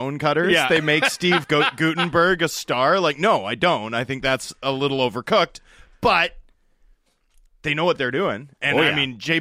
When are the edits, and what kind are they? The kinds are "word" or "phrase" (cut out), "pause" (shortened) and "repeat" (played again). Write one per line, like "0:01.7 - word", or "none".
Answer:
none